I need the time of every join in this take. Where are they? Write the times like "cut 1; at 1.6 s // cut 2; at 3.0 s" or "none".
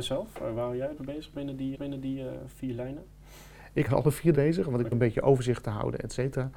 cut 1; at 1.0 s // cut 2; at 1.7 s // cut 3; at 3.9 s // cut 4; at 4.3 s // cut 5; at 4.9 s